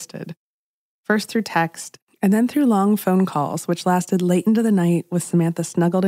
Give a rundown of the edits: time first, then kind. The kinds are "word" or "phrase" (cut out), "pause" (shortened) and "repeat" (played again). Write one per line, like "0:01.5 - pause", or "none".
none